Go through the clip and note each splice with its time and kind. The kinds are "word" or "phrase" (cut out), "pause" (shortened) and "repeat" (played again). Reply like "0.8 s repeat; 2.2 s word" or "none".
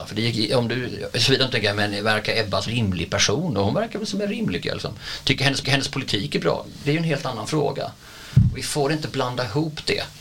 2.7 s word; 4.6 s phrase; 5.6 s repeat